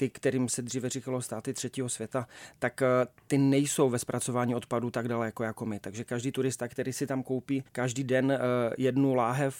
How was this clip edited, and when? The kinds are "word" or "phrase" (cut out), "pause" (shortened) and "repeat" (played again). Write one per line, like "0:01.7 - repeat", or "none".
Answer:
0:07.7 - pause

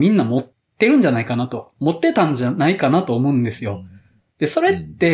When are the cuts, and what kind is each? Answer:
none

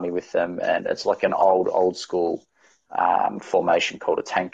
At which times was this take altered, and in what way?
none

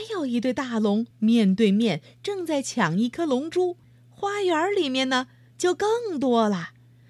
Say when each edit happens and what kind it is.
0:01.1 - pause
0:03.8 - pause

